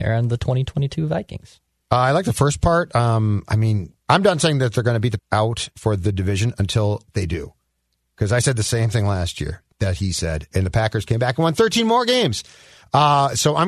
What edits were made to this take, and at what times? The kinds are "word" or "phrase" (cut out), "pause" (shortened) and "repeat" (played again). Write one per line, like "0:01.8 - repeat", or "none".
0:04.0 - pause
0:05.2 - word
0:05.7 - pause
0:09.7 - pause
0:10.5 - word